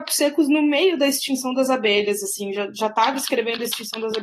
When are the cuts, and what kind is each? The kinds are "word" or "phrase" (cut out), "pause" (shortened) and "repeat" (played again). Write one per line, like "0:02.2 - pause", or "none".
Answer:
none